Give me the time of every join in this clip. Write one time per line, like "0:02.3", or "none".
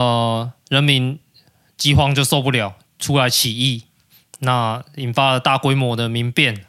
none